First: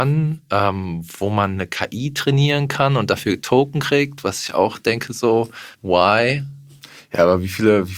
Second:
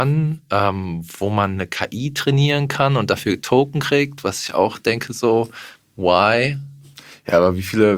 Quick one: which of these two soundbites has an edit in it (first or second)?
first